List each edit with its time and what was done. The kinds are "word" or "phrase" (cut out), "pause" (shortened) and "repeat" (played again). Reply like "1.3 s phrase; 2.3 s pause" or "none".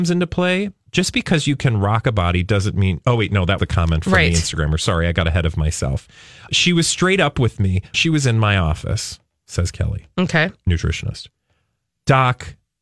3.6 s word; 6.5 s word; 7.9 s word